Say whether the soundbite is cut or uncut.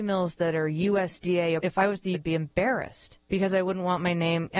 cut